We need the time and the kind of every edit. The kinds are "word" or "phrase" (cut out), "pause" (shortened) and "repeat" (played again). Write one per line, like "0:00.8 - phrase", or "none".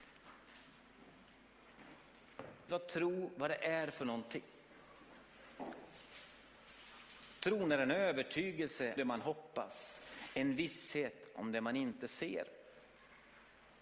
0:02.7 - word
0:09.0 - word